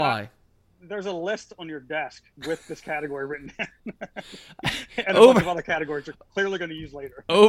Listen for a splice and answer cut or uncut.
uncut